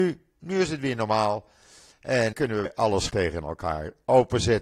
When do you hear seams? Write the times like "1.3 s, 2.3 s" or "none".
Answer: 2.3 s, 2.7 s, 3.1 s